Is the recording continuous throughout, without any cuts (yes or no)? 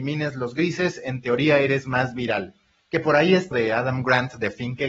no